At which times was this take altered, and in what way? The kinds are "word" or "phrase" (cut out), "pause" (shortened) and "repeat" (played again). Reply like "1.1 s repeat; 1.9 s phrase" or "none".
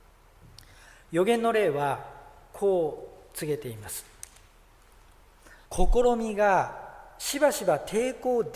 5.6 s pause